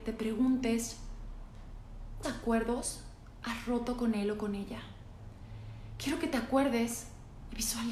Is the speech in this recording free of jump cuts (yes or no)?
no